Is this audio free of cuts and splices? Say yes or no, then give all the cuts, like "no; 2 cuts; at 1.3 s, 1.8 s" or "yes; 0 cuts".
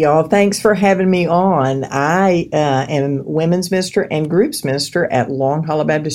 yes; 0 cuts